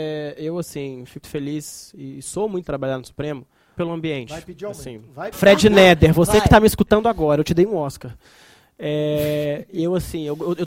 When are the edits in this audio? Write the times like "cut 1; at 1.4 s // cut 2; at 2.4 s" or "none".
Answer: cut 1; at 1.2 s // cut 2; at 2.6 s // cut 3; at 3.8 s // cut 4; at 5.3 s